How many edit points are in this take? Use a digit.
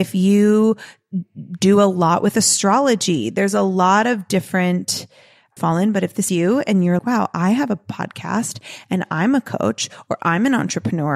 3